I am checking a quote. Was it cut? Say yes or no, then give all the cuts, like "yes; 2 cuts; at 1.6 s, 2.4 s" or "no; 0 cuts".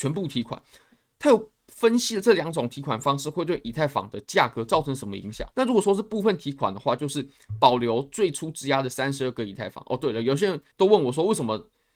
yes; 2 cuts; at 5.5 s, 10.7 s